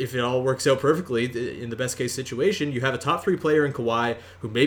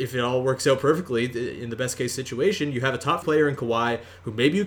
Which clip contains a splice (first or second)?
second